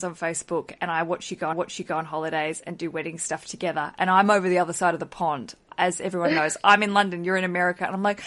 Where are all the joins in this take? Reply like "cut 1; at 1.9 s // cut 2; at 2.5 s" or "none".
cut 1; at 1.5 s